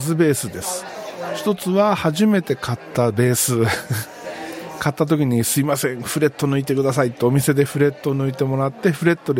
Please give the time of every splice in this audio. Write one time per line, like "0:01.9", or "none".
none